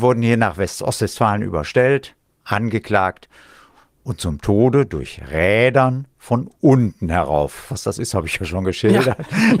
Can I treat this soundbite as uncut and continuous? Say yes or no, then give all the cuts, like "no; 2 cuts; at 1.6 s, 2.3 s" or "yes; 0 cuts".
yes; 0 cuts